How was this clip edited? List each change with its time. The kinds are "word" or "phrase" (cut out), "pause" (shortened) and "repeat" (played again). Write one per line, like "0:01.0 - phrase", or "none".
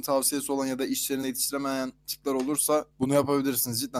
0:01.2 - word
0:02.9 - pause

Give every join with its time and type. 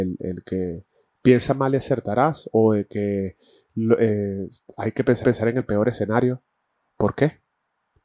0:05.2 - repeat

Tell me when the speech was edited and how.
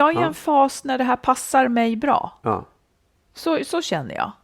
none

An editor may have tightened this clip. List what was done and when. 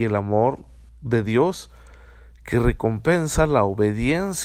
none

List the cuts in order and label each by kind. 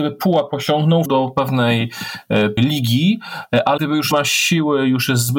0:01.1 - word
0:02.6 - word
0:03.8 - word
0:04.1 - word

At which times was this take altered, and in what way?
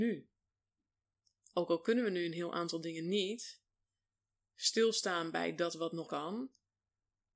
0:06.1 - word

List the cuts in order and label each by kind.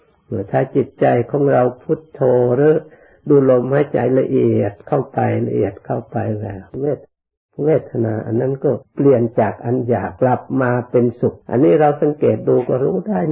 0:06.7 - pause
0:08.8 - pause
0:10.2 - pause
0:11.4 - pause

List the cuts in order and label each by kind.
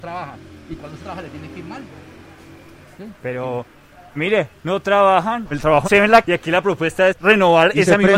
0:01.0 - word
0:04.2 - word
0:04.5 - word
0:05.5 - word
0:05.8 - word
0:06.2 - word
0:07.1 - word

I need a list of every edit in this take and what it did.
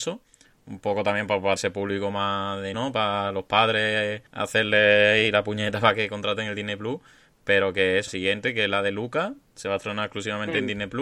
0:01.6 - word
0:02.7 - word
0:04.3 - pause
0:08.1 - word

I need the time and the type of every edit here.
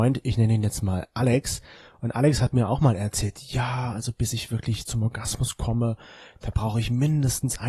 none

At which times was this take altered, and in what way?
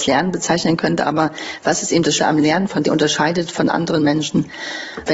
0:02.2 - word
0:02.8 - phrase

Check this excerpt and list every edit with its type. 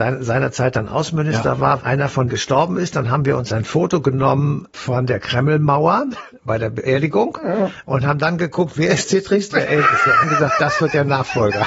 0:01.8 - word
0:02.3 - word
0:04.7 - word
0:09.0 - word
0:09.5 - word
0:10.2 - word

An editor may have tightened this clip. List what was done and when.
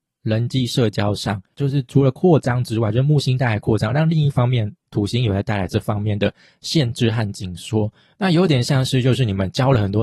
none

